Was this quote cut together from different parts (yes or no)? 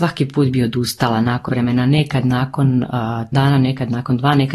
yes